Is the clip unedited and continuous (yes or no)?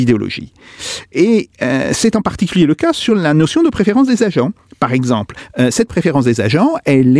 yes